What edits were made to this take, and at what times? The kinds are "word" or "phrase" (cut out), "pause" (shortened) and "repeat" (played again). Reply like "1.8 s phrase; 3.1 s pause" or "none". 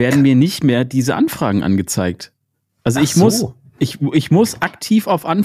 none

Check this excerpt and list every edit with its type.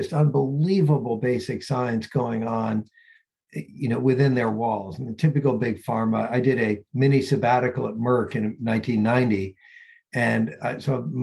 6.9 s pause

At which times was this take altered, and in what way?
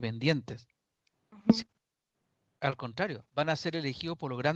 1.6 s phrase; 3.3 s pause

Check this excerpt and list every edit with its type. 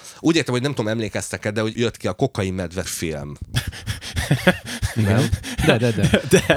1.7 s word; 2.8 s word

